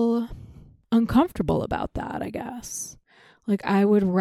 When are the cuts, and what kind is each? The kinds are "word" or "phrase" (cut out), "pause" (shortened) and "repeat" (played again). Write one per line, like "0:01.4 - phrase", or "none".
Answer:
none